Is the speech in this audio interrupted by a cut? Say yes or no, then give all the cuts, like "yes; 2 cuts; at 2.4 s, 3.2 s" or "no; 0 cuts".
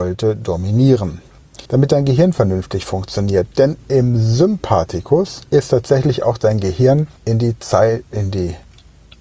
yes; 3 cuts; at 1.7 s, 5.5 s, 7.2 s